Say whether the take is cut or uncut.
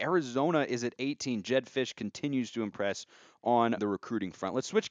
cut